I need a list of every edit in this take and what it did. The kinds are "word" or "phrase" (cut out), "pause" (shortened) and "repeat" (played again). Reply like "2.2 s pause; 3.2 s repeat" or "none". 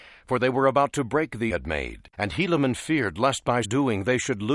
1.5 s phrase; 2.1 s pause; 3.6 s word

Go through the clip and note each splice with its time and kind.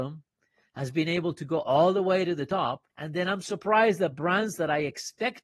2.9 s pause

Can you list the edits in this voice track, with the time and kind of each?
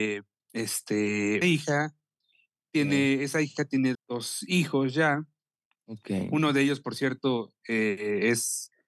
1.4 s word; 3.9 s word

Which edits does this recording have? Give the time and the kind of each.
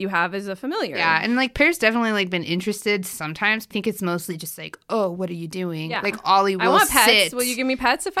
3.7 s word

